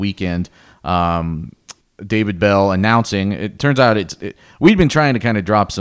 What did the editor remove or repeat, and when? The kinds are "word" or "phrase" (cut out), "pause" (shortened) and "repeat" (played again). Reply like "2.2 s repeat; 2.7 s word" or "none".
1.8 s pause